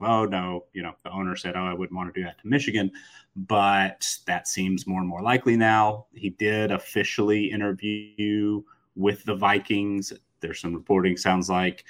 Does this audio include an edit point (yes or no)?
no